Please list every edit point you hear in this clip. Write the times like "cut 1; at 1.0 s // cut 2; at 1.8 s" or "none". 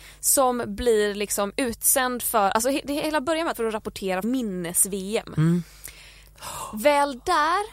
cut 1; at 3.5 s // cut 2; at 4.2 s